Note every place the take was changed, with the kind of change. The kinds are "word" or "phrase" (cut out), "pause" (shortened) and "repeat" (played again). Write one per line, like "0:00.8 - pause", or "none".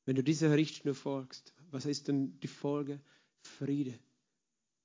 none